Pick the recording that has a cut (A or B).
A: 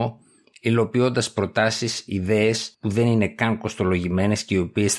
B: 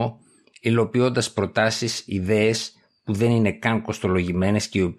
A